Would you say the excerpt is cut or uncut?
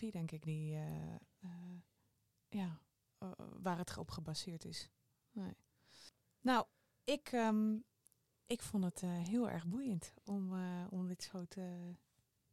uncut